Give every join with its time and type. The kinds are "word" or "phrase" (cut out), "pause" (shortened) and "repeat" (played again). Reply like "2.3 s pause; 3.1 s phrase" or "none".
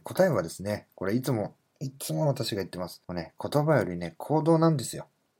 3.0 s pause